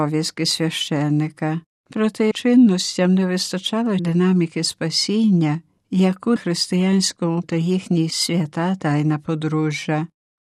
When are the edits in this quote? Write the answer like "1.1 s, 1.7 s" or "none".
2.3 s, 4.0 s, 6.4 s, 7.4 s, 8.1 s